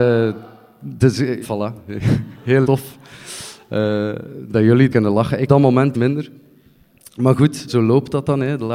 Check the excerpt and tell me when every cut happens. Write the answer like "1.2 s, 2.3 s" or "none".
1.4 s, 2.6 s, 4.9 s, 5.5 s, 5.9 s, 7.7 s